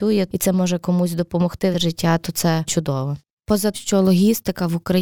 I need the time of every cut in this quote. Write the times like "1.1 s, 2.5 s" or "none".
1.7 s, 2.7 s, 3.7 s